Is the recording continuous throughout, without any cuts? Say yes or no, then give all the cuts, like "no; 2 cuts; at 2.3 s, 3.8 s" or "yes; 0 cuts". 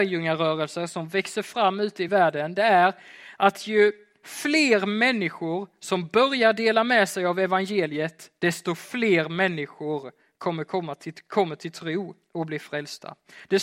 yes; 0 cuts